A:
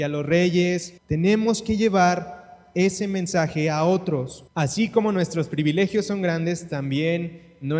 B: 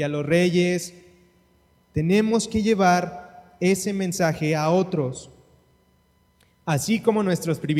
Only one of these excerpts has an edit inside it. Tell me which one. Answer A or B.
A